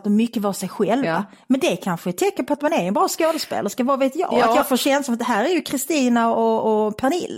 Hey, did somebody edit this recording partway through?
no; 0 cuts

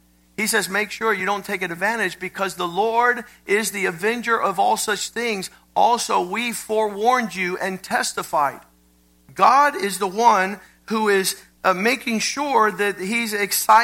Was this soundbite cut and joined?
no; 0 cuts

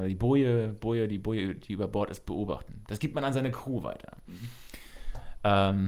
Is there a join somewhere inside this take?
no; 0 cuts

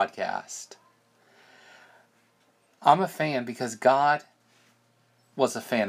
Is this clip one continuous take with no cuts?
yes; 0 cuts

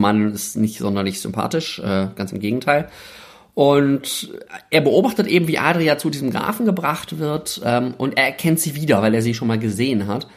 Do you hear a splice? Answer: no; 0 cuts

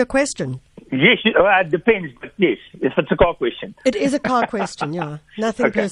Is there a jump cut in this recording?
no; 0 cuts

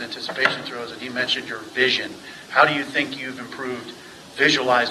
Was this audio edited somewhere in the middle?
no; 0 cuts

